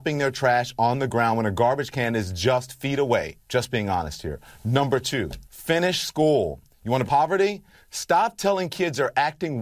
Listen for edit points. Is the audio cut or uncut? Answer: cut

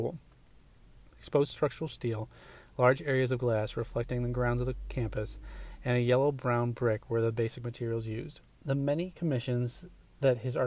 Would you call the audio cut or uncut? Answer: uncut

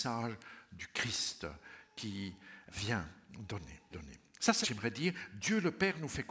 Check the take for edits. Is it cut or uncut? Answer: cut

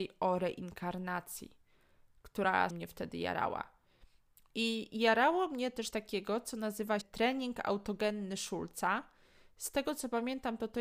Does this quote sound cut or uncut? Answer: cut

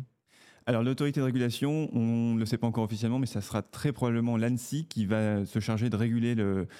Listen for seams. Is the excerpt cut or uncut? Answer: uncut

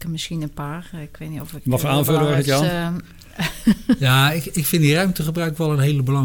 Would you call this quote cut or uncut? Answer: uncut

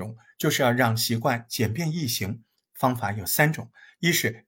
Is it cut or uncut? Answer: uncut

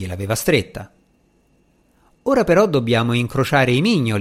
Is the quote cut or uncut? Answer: uncut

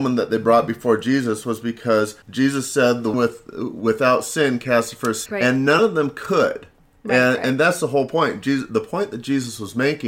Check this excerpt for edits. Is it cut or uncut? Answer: cut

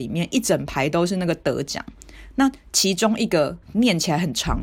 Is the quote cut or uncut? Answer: cut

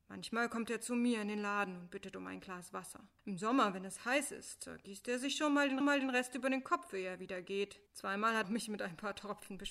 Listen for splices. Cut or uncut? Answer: cut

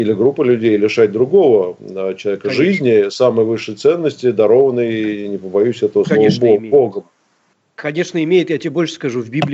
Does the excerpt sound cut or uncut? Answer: uncut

